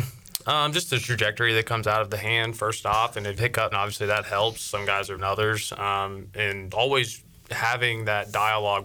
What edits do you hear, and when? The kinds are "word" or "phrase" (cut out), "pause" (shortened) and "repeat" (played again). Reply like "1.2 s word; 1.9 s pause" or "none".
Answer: 3.4 s phrase; 3.7 s word; 5.2 s phrase; 6.7 s word